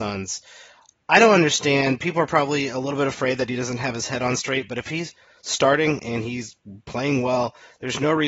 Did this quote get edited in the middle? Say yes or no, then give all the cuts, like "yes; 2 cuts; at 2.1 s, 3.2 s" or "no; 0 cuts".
no; 0 cuts